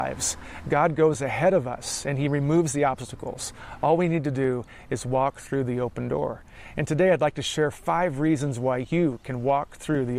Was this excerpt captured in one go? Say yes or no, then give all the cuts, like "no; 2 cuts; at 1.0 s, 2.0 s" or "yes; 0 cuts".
yes; 0 cuts